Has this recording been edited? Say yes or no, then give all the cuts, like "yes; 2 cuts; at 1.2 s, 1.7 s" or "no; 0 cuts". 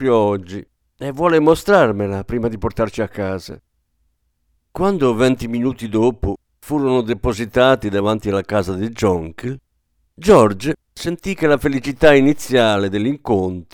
no; 0 cuts